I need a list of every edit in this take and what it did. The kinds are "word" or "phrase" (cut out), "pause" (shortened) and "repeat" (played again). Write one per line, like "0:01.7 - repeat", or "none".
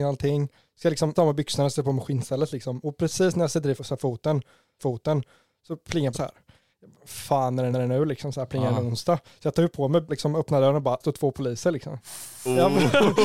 0:01.1 - word
0:03.8 - word
0:04.8 - repeat
0:06.1 - word
0:07.7 - repeat
0:10.1 - phrase
0:11.0 - phrase